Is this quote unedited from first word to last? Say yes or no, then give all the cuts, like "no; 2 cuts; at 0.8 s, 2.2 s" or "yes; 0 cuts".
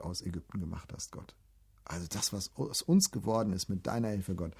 yes; 0 cuts